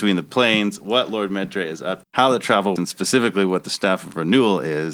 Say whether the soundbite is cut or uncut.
cut